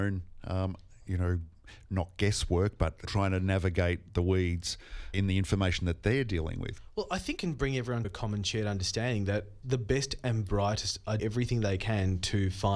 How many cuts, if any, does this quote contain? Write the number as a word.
six